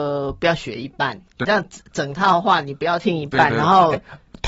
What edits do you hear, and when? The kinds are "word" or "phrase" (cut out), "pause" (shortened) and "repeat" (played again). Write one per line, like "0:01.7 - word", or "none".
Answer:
0:01.4 - word